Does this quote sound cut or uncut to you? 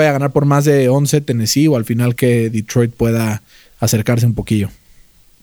cut